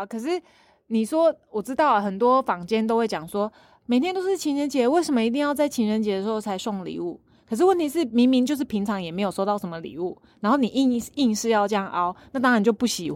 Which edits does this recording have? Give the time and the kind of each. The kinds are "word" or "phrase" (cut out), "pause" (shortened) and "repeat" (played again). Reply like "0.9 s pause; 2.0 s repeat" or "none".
none